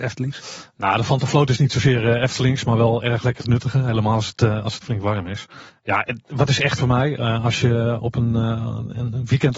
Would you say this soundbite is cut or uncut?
cut